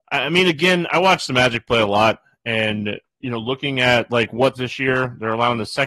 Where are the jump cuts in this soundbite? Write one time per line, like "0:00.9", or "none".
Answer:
0:04.5